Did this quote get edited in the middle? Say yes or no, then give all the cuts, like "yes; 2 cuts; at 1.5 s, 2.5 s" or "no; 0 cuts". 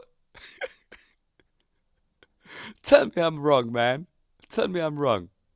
no; 0 cuts